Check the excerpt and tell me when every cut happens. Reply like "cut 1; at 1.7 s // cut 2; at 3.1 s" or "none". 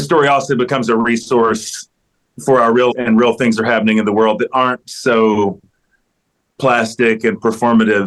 cut 1; at 2.9 s

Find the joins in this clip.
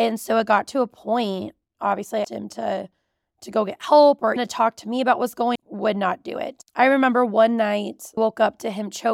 cut 1; at 2.2 s // cut 2; at 4.4 s // cut 3; at 5.6 s // cut 4; at 8.2 s

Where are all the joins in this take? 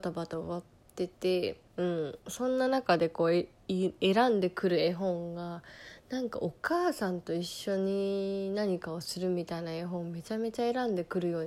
cut 1; at 1.7 s // cut 2; at 2.2 s

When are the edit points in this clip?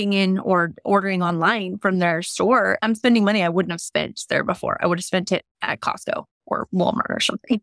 none

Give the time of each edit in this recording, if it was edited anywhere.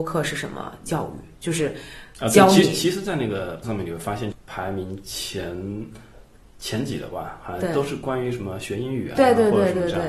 cut 1; at 3.6 s

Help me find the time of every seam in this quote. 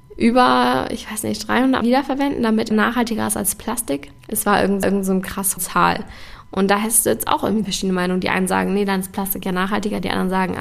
cut 1; at 1.8 s // cut 2; at 2.7 s // cut 3; at 4.2 s // cut 4; at 4.8 s // cut 5; at 5.6 s // cut 6; at 7.6 s

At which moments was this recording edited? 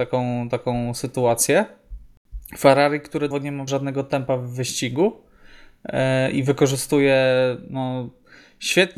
cut 1; at 3.3 s // cut 2; at 3.7 s

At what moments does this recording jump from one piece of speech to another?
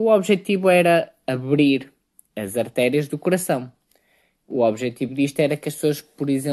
none

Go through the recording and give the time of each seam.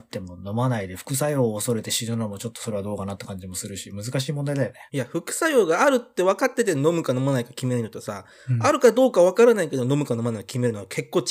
cut 1; at 4.9 s

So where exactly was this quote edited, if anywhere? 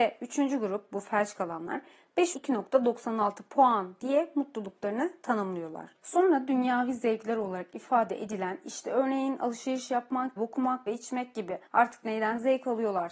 cut 1; at 2.3 s // cut 2; at 6.0 s // cut 3; at 10.4 s // cut 4; at 10.9 s // cut 5; at 11.7 s

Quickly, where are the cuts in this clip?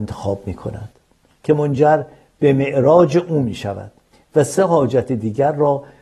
none

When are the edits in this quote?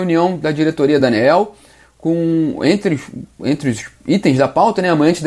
none

